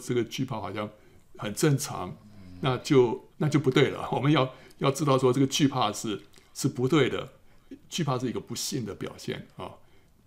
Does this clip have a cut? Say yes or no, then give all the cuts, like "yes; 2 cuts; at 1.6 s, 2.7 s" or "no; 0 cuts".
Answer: yes; 1 cut; at 3.3 s